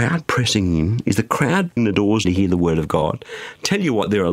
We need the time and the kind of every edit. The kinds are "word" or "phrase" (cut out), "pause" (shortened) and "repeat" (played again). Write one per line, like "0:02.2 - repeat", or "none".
0:01.8 - word
0:02.2 - word

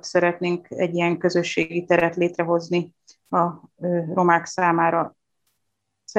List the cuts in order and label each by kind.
none

